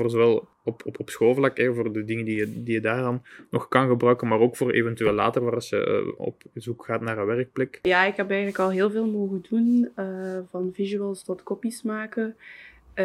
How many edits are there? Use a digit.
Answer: 0